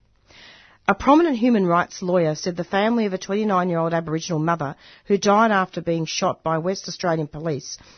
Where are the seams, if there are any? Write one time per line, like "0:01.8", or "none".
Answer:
none

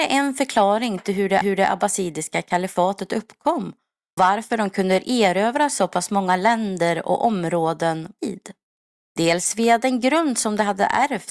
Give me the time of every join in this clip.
0:01.4
0:04.2
0:08.2
0:08.8

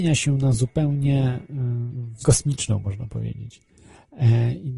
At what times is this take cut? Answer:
0:02.2

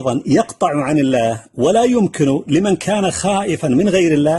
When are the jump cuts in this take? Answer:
none

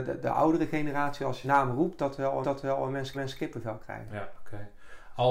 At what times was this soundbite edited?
0:01.4
0:02.4
0:03.1

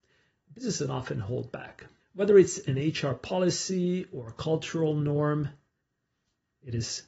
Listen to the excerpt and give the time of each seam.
0:02.0

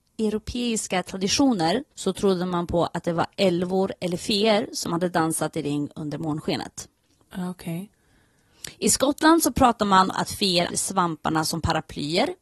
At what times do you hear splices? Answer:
0:01.9
0:10.1
0:10.7

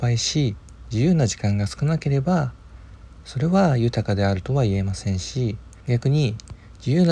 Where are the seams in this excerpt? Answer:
0:05.8

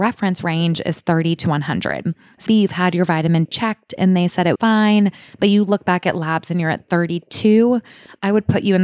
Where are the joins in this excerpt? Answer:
0:02.5
0:03.5
0:04.6

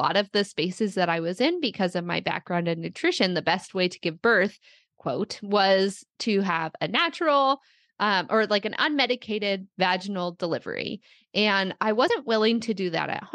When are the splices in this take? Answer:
none

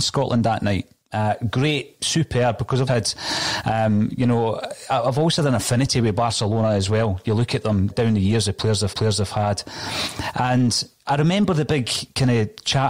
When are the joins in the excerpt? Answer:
0:02.9
0:07.9
0:08.9

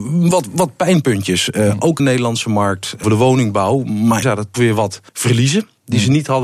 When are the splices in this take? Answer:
0:02.0
0:03.0
0:04.2
0:04.5
0:05.1

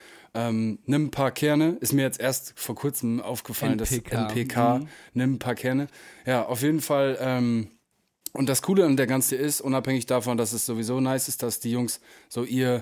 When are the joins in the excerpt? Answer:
0:09.3

